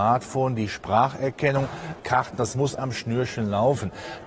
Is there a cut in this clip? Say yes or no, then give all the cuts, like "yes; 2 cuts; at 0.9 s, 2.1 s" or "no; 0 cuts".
yes; 2 cuts; at 2.0 s, 2.8 s